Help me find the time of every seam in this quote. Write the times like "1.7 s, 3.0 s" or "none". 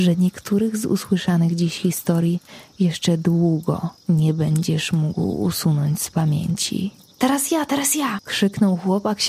none